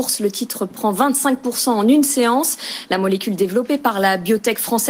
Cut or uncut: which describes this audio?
uncut